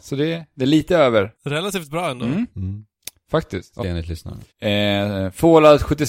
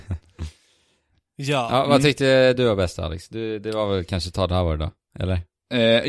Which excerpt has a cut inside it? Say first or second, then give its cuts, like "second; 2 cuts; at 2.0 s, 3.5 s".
first; 3 cuts; at 1.4 s, 3.8 s, 4.5 s